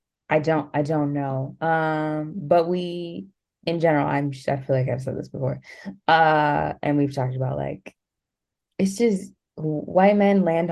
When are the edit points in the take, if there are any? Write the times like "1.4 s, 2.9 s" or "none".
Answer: none